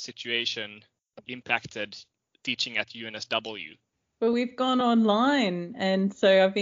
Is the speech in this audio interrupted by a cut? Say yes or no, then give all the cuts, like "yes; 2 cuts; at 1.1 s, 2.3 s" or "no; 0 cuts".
no; 0 cuts